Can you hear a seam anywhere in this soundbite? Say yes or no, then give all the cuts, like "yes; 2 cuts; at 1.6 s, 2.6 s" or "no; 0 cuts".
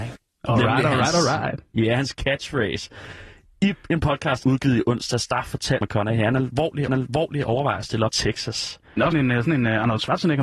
yes; 6 cuts; at 2.1 s, 4.4 s, 5.8 s, 6.9 s, 8.1 s, 9.1 s